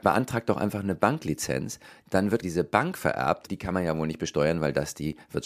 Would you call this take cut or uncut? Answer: cut